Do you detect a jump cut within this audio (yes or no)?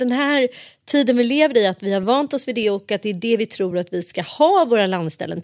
no